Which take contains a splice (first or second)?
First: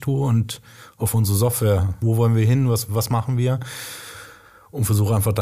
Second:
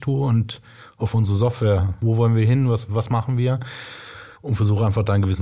second